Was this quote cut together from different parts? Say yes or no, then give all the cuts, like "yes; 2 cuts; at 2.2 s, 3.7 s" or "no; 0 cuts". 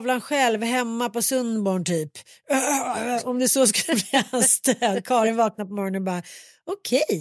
no; 0 cuts